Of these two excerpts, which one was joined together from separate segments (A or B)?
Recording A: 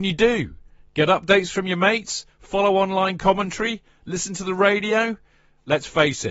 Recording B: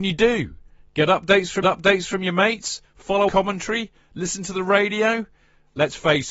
B